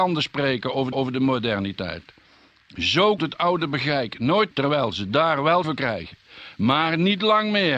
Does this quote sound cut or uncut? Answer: cut